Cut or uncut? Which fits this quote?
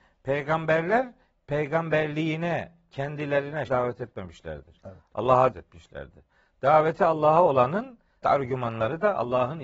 cut